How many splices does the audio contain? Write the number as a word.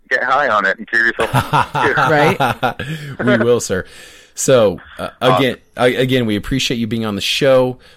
zero